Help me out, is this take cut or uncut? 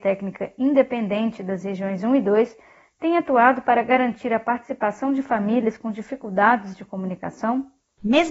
uncut